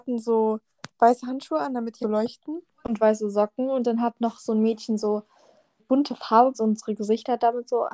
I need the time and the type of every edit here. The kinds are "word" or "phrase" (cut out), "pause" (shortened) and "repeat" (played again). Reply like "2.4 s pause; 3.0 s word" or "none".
2.0 s phrase; 2.7 s pause; 5.8 s word; 6.5 s phrase